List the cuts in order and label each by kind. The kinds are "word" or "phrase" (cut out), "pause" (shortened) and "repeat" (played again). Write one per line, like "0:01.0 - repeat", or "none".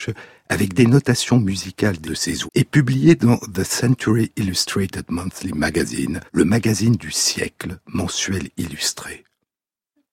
0:02.1 - word
0:02.5 - word
0:06.3 - pause